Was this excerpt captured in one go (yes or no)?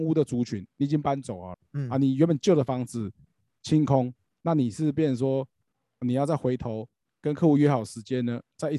yes